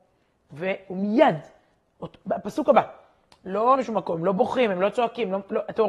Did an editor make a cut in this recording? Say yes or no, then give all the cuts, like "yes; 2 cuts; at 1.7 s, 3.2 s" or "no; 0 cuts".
yes; 1 cut; at 3.8 s